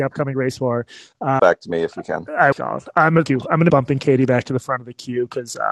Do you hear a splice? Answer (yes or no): yes